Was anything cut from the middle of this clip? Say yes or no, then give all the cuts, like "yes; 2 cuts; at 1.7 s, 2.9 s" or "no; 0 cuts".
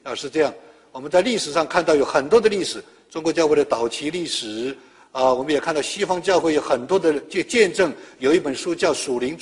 no; 0 cuts